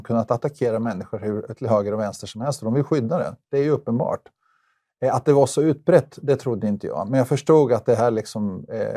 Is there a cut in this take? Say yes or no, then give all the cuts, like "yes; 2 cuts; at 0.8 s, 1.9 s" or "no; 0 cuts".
no; 0 cuts